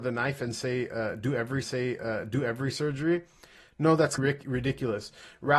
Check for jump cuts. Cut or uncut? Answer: cut